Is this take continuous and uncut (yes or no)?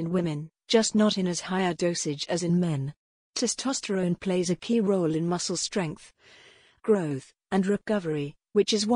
yes